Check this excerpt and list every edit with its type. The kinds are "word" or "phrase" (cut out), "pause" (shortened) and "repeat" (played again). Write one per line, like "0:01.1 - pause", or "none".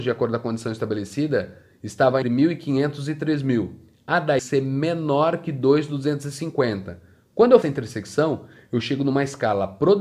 0:02.2 - word
0:04.4 - phrase
0:07.6 - word